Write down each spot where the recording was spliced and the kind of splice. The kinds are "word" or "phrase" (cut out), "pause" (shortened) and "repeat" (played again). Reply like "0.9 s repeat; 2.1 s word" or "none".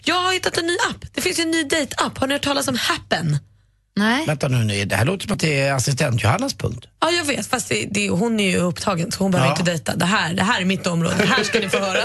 none